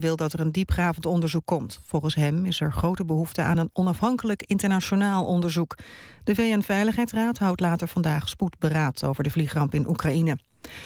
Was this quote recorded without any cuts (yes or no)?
yes